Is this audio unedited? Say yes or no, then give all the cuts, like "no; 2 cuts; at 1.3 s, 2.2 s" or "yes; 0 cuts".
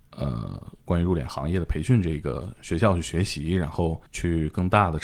no; 1 cut; at 4.1 s